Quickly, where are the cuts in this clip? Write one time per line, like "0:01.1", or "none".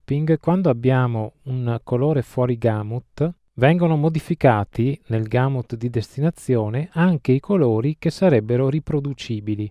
none